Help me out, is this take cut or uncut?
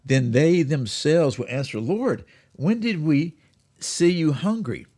uncut